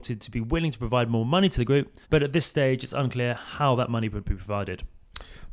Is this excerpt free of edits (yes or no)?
no